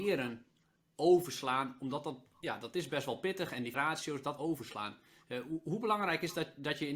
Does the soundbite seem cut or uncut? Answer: cut